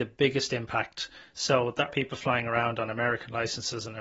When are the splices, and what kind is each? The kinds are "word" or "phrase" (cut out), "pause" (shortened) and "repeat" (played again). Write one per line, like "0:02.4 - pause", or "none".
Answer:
0:01.9 - word